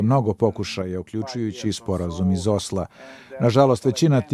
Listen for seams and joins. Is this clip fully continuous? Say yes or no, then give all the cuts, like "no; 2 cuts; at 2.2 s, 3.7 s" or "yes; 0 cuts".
yes; 0 cuts